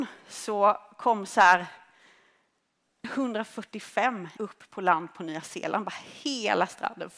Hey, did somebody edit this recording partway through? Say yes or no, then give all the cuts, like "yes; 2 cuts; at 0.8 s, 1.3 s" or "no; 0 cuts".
yes; 2 cuts; at 3.0 s, 4.4 s